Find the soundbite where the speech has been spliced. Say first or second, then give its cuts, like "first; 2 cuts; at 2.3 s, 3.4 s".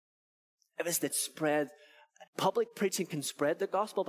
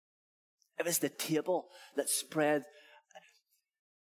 first; 2 cuts; at 1.1 s, 2.3 s